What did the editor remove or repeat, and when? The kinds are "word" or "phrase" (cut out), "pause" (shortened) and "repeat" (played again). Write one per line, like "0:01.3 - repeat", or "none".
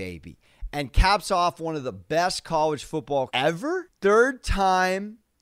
0:03.3 - word